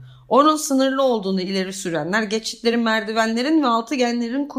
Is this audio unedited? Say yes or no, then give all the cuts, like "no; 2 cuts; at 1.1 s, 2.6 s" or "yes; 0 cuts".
yes; 0 cuts